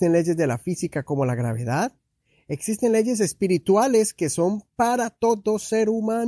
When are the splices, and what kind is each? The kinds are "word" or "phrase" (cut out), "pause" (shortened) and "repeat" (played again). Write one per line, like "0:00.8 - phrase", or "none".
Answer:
none